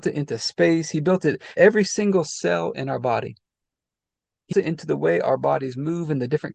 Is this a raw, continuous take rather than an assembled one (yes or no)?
no